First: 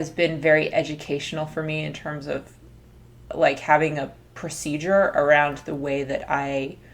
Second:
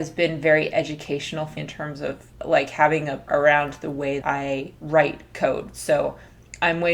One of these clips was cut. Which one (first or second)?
second